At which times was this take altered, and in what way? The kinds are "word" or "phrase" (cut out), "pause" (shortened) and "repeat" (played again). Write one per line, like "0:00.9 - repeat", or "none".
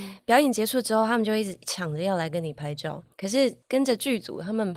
0:03.1 - pause